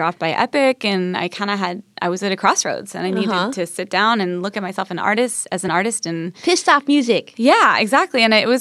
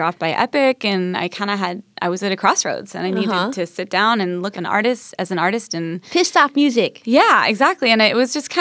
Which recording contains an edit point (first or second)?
second